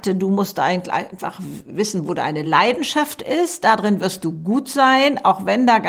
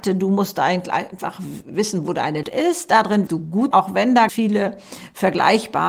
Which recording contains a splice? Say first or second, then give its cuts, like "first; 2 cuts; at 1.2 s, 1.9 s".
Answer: second; 4 cuts; at 2.4 s, 3.3 s, 3.7 s, 4.3 s